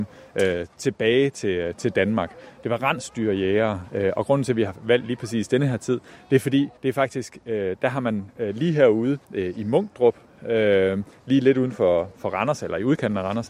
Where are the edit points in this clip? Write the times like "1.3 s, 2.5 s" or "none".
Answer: 6.8 s, 9.2 s